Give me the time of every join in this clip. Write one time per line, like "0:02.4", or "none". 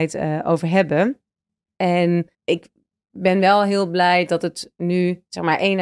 0:02.3